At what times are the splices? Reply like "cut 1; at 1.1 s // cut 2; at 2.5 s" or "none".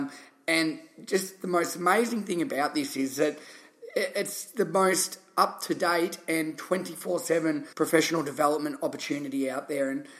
cut 1; at 7.7 s